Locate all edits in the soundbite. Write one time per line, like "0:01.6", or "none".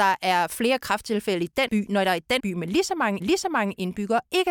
0:01.7
0:02.4
0:03.2